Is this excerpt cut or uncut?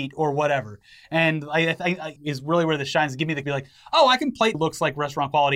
cut